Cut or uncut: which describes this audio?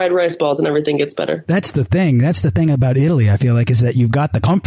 uncut